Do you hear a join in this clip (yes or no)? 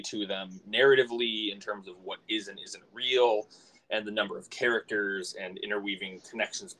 no